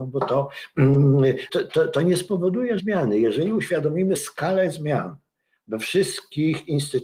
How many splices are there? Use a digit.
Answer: 3